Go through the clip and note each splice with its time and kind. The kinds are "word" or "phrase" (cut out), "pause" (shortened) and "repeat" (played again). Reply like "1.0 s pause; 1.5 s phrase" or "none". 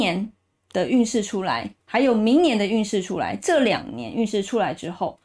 1.8 s word